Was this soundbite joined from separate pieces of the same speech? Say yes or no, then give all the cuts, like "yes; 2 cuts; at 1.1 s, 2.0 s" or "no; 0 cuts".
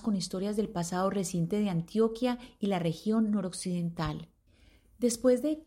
yes; 1 cut; at 4.5 s